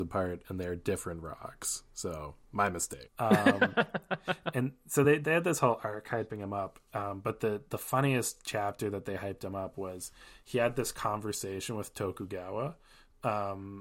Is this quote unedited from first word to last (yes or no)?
yes